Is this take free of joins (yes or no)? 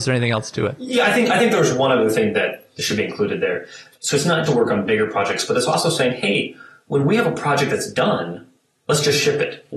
no